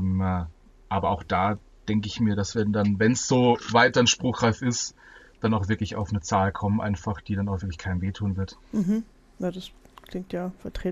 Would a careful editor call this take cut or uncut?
uncut